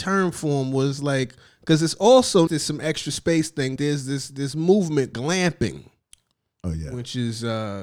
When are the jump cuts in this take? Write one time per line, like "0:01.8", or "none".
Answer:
0:01.5
0:02.5
0:03.8
0:05.1